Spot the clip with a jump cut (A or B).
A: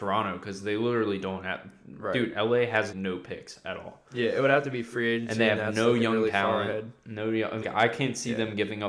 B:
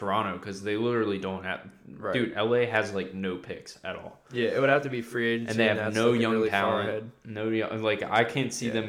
A